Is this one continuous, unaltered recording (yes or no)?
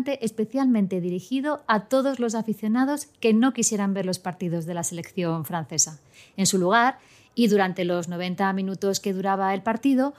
yes